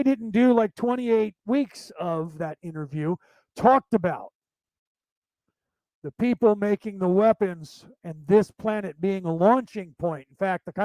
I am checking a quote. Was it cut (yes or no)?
no